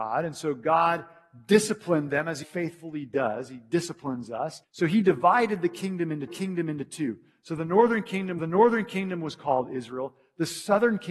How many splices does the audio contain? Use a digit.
4